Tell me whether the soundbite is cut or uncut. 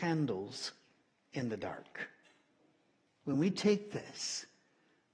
uncut